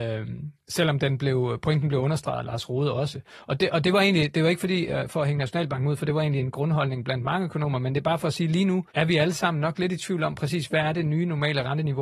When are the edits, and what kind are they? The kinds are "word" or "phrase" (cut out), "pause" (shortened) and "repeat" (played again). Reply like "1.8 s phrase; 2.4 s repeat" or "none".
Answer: 8.9 s pause